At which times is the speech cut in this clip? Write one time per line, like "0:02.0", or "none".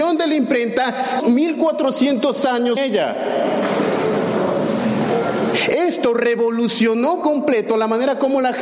0:01.2
0:02.8
0:07.2